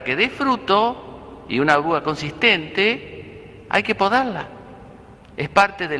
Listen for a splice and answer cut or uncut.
uncut